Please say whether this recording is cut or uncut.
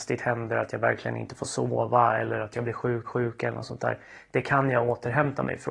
cut